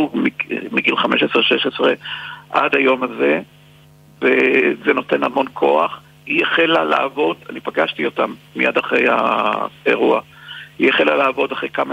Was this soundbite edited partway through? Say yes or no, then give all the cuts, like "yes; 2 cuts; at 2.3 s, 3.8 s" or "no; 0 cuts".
no; 0 cuts